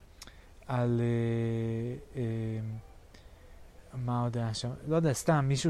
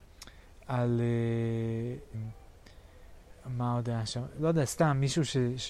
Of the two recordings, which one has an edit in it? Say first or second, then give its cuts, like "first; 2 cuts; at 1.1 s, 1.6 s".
second; 1 cut; at 2.1 s